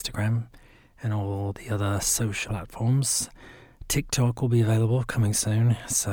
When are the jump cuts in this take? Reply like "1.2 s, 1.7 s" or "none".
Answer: 2.5 s